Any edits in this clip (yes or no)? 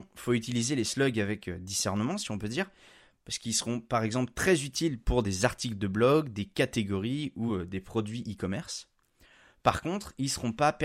no